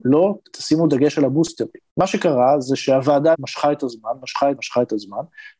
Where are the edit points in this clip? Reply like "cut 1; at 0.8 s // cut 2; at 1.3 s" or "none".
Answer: cut 1; at 3.3 s // cut 2; at 4.6 s